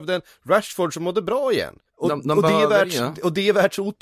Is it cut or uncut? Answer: cut